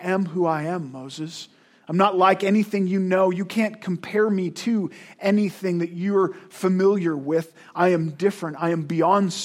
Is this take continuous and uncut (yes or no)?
yes